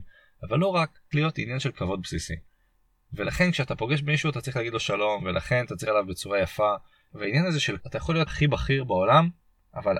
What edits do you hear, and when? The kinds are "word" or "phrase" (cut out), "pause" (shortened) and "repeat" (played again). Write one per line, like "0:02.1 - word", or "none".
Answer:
0:01.1 - word
0:05.9 - word
0:07.8 - word
0:08.3 - word